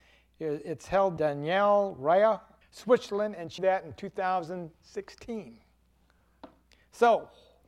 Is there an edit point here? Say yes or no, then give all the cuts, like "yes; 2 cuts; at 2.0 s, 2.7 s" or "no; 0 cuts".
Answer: yes; 3 cuts; at 1.2 s, 2.6 s, 3.6 s